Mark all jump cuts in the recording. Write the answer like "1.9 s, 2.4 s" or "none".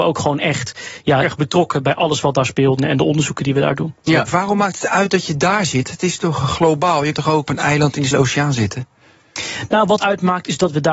1.2 s, 2.8 s, 4.3 s, 7.1 s, 7.5 s, 8.1 s, 10.0 s